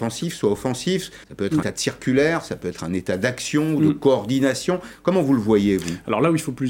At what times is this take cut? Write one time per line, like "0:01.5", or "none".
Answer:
0:01.2
0:01.6